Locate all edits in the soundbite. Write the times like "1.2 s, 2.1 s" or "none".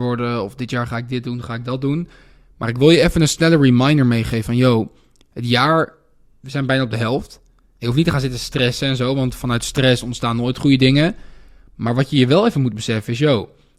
none